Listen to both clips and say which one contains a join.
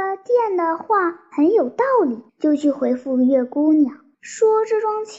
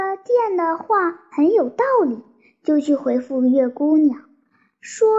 first; 2 cuts; at 2.3 s, 4.1 s

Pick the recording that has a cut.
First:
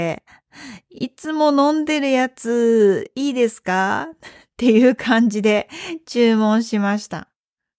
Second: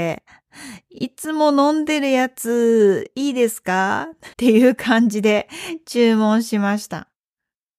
second; 1 cut; at 4.3 s

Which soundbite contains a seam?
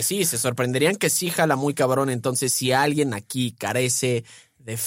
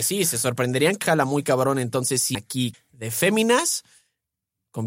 second; 3 cuts; at 1.0 s, 2.3 s, 2.7 s

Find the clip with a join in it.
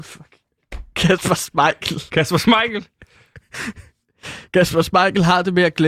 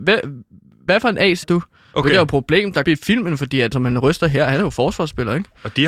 second; 3 cuts; at 1.4 s, 2.8 s, 3.7 s

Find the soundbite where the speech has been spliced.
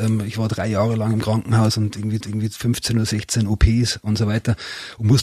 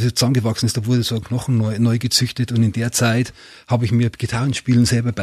first; 1 cut; at 2.2 s

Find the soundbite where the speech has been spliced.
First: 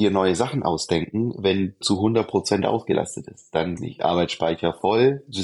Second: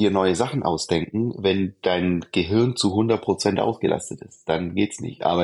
first; 2 cuts; at 1.8 s, 3.8 s

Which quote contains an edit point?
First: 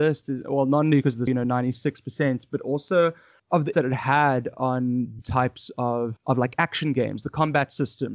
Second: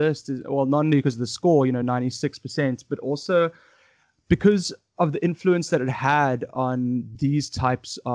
first; 5 cuts; at 1.3 s, 3.4 s, 3.7 s, 5.2 s, 6.2 s

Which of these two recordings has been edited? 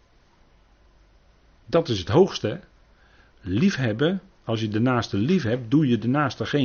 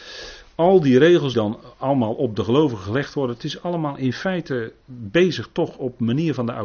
second; 1 cut; at 1.3 s

